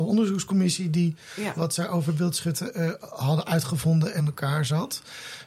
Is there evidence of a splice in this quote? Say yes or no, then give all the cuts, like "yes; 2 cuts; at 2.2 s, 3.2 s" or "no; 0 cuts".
yes; 2 cuts; at 1.6 s, 4.2 s